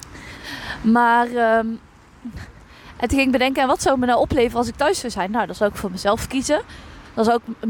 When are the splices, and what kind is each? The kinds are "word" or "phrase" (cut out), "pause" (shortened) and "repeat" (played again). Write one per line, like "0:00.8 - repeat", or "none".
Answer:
none

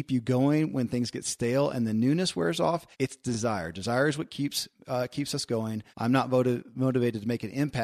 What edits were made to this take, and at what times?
0:02.9 - pause
0:05.9 - pause

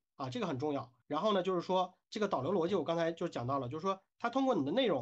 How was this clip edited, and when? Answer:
0:01.0 - pause
0:02.0 - pause

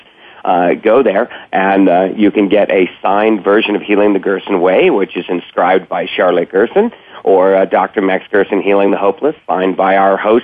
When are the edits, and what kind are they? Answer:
none

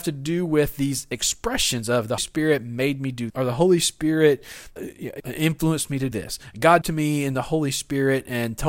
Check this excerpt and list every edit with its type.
0:02.2 - word
0:03.3 - word
0:04.8 - word
0:05.2 - word
0:06.1 - word
0:06.8 - word

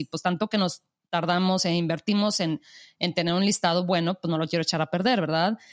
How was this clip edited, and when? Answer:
none

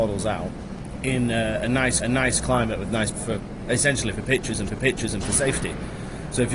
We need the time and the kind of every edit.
0:02.0 - repeat
0:03.1 - word
0:04.7 - repeat

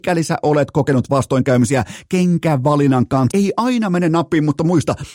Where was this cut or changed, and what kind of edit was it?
0:03.3 - word

